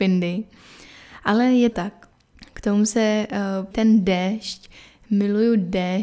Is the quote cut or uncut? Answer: cut